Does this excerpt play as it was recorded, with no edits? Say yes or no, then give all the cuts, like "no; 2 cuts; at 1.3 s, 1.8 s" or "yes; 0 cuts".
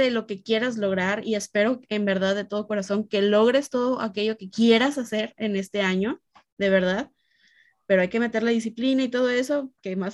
yes; 0 cuts